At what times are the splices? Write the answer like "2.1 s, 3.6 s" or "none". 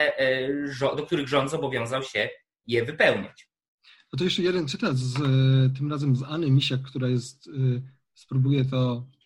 none